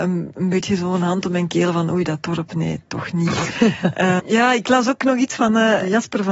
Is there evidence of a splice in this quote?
yes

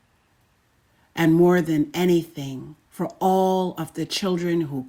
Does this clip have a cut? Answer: yes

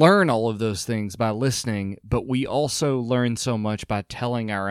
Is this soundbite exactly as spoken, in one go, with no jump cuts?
yes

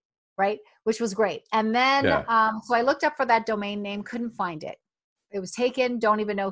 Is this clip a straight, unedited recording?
yes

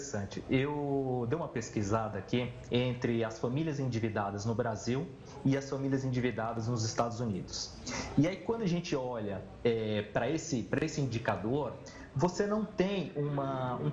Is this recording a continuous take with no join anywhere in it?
yes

